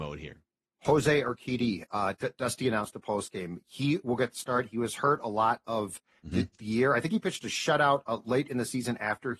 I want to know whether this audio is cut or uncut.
uncut